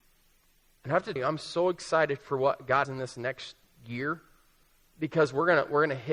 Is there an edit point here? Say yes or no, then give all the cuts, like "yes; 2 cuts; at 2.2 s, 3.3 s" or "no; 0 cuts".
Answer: yes; 2 cuts; at 1.2 s, 2.8 s